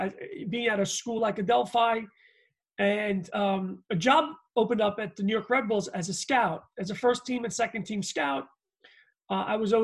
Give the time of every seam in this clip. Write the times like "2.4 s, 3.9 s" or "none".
none